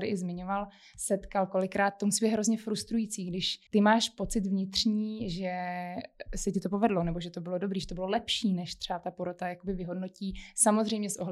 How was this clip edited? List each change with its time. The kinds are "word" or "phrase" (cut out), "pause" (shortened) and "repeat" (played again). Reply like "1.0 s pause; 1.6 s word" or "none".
3.7 s pause